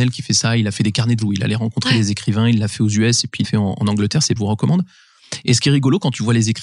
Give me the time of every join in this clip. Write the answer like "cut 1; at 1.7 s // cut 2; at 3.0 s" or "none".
cut 1; at 1.2 s // cut 2; at 3.4 s // cut 3; at 4.4 s